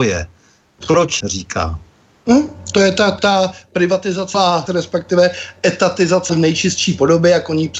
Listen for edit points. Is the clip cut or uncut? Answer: cut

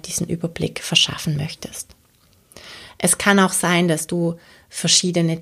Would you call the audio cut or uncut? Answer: uncut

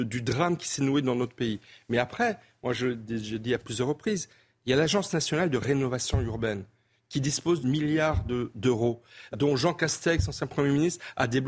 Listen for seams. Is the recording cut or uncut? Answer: cut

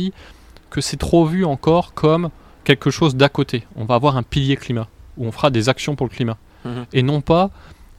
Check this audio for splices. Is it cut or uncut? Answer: uncut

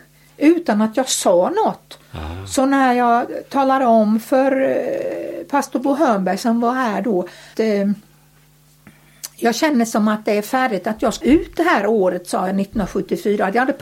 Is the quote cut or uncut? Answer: cut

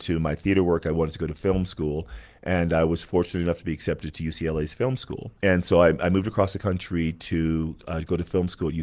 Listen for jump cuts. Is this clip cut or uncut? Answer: cut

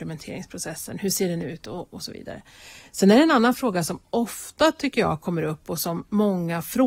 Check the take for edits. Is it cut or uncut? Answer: uncut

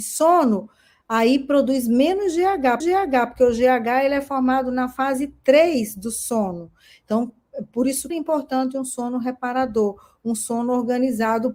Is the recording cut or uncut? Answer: cut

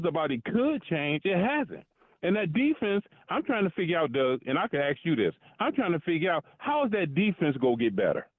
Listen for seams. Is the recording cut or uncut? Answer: uncut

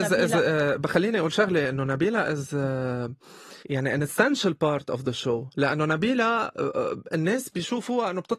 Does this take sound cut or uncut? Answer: cut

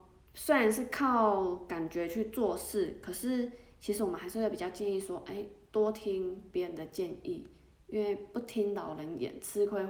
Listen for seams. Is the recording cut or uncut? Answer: uncut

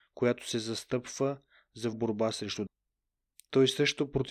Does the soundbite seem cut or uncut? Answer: cut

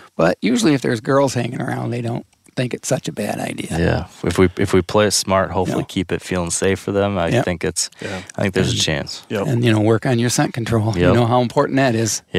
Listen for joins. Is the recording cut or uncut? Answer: uncut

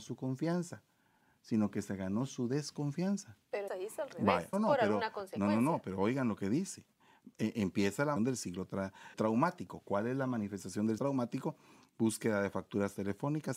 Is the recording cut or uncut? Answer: cut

